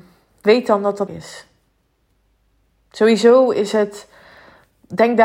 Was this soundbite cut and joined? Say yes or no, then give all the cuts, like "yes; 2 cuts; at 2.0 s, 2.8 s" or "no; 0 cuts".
yes; 1 cut; at 1.1 s